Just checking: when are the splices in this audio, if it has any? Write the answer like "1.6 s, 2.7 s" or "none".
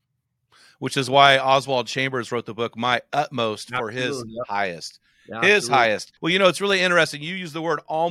6.2 s